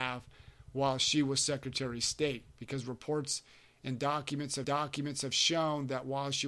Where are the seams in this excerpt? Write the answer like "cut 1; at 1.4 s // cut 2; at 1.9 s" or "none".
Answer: cut 1; at 4.6 s